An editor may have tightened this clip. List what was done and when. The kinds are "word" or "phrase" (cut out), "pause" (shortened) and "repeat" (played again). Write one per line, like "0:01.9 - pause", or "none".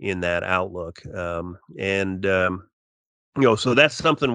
none